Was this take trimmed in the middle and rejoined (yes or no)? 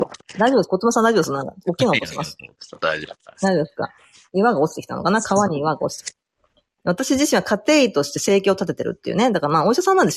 no